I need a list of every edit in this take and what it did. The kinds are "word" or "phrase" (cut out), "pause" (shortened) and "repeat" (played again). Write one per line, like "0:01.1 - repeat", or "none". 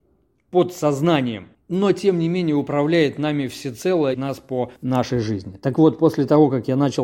0:01.5 - pause
0:04.1 - phrase
0:04.8 - pause

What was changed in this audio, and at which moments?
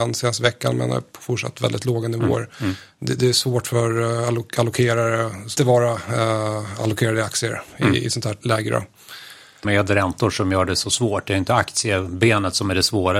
0:05.6 - phrase
0:08.4 - word
0:09.6 - phrase

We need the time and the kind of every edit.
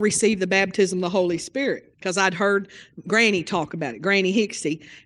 0:01.9 - pause

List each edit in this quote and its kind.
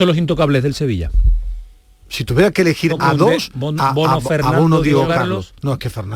0:02.9 - word

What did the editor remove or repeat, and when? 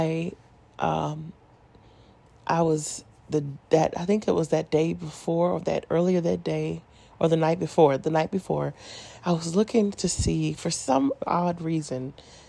none

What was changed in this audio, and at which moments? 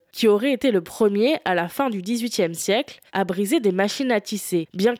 0:03.1 - pause

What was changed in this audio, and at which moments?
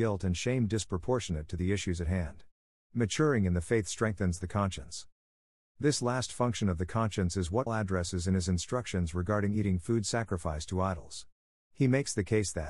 0:07.7 - word

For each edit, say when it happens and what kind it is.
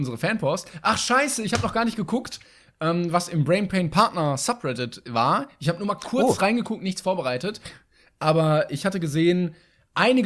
none

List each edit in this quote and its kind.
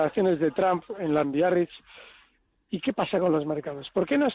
0:01.2 - word

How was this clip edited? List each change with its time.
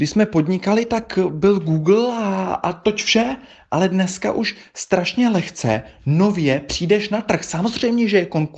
none

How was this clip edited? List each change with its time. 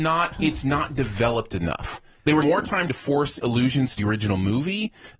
0:02.4 - word
0:02.9 - word
0:03.4 - word
0:04.0 - word

